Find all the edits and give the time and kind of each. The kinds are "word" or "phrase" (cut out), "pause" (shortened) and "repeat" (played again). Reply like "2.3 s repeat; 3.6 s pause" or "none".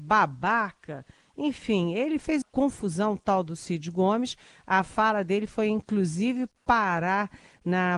2.4 s word